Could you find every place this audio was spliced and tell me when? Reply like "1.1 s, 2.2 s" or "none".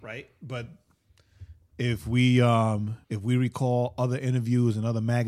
3.0 s